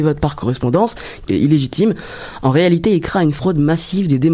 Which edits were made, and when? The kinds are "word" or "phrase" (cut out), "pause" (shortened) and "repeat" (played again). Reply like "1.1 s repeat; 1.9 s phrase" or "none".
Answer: 1.3 s phrase